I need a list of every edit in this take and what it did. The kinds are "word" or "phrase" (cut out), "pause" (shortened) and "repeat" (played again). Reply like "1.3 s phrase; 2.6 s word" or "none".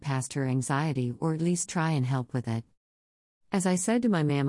none